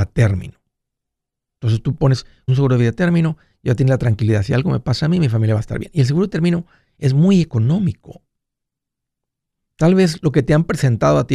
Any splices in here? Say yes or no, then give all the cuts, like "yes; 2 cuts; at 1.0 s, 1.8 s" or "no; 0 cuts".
yes; 1 cut; at 2.5 s